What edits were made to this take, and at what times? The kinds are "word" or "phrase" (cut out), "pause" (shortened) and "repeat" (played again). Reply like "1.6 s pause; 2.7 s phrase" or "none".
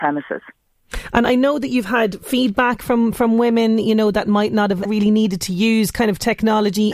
4.9 s word